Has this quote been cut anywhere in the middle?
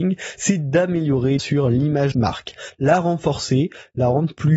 yes; 2 cuts; at 1.4 s, 2.1 s

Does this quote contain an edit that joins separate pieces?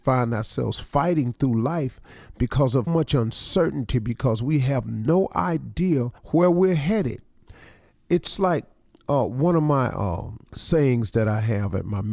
yes; 3 cuts; at 2.9 s, 6.2 s, 10.5 s

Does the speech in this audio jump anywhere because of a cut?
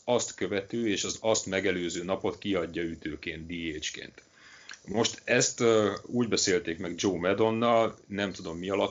no; 0 cuts

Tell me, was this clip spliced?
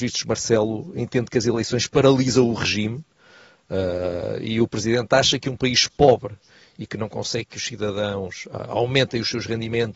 no; 0 cuts

